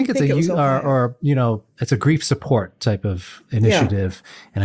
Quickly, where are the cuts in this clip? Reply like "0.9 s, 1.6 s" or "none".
none